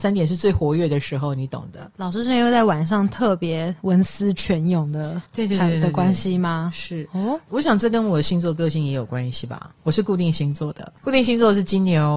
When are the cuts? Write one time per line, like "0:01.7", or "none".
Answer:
0:05.3
0:07.5
0:11.0

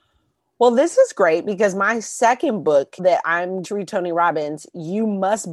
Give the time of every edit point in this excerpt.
0:03.0
0:03.6

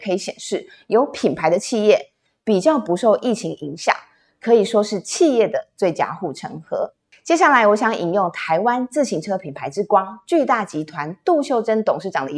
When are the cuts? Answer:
none

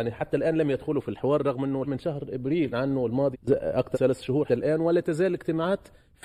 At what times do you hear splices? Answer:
0:01.8
0:02.7
0:03.3
0:03.9
0:04.5

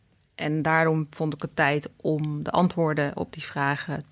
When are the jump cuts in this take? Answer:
none

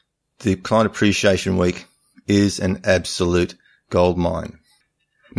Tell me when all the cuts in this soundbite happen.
none

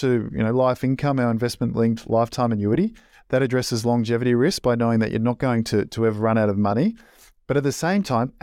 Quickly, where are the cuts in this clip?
none

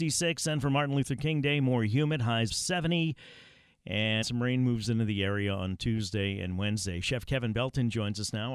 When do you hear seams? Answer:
0:02.5
0:04.2

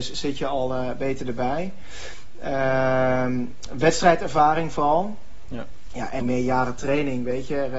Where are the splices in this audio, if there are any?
0:06.2

